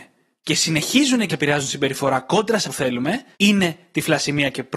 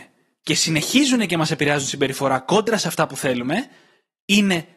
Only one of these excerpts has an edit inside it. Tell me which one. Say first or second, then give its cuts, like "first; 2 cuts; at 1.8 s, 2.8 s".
first; 3 cuts; at 1.3 s, 2.6 s, 3.3 s